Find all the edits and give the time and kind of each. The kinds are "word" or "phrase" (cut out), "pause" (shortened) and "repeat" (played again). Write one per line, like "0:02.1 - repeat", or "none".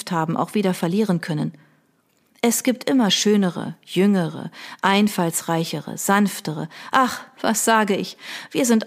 none